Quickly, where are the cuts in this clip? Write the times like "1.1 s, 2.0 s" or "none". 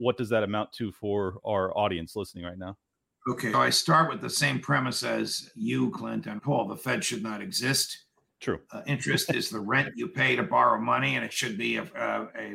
3.5 s, 6.4 s